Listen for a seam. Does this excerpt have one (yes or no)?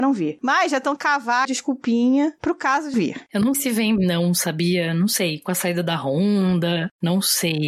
yes